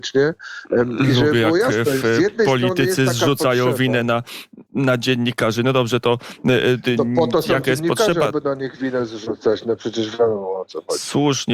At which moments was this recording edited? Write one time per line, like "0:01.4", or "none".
0:04.7